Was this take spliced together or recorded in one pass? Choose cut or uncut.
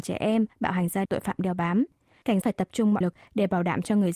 cut